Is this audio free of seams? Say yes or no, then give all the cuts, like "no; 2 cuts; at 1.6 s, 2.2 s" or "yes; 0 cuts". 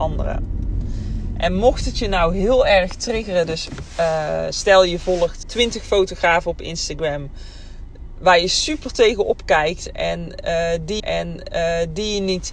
no; 2 cuts; at 5.4 s, 11.0 s